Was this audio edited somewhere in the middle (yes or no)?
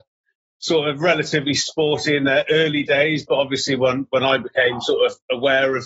no